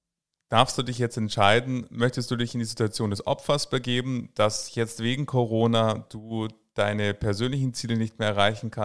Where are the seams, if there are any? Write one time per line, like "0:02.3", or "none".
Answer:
none

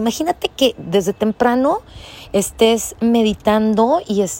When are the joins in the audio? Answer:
none

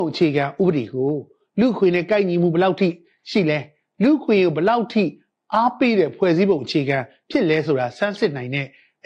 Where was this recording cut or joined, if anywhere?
none

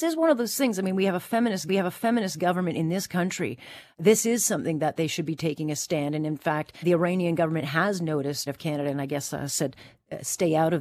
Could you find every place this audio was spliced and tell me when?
0:01.7
0:06.8
0:08.5

